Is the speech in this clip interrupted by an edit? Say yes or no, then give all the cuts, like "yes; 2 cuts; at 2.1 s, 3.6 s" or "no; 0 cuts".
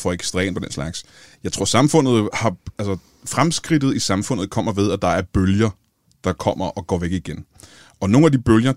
no; 0 cuts